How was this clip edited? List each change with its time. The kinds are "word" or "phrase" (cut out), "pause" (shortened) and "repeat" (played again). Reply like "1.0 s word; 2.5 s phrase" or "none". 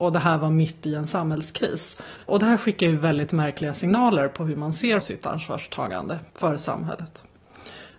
2.2 s pause; 5.0 s word; 6.3 s pause